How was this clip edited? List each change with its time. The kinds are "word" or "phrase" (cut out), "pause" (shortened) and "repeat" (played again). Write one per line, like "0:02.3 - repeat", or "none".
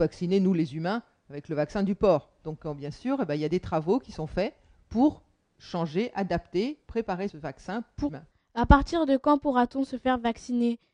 0:08.1 - word